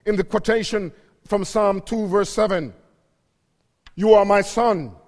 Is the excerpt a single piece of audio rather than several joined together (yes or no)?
yes